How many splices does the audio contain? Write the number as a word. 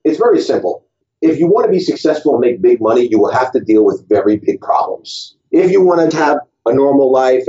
three